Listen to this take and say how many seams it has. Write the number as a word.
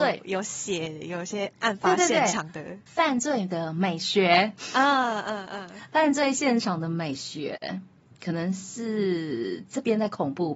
one